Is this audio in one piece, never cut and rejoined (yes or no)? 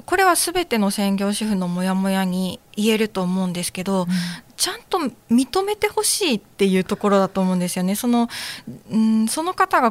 no